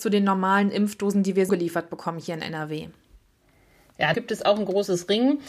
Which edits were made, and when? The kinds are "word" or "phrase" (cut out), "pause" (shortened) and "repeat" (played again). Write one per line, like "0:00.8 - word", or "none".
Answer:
0:01.5 - word
0:04.1 - word